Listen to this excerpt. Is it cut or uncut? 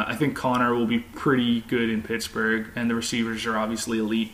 uncut